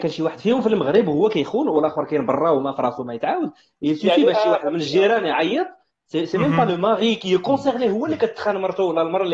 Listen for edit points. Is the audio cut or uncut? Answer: uncut